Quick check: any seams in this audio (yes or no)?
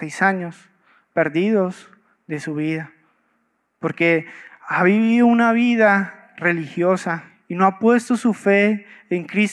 no